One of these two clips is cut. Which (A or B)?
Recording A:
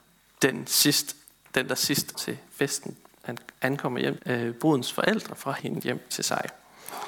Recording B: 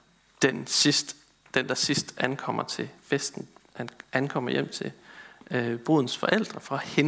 A